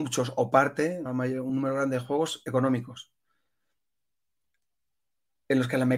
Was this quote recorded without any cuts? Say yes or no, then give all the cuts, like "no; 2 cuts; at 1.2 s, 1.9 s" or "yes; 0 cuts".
no; 2 cuts; at 1.1 s, 1.5 s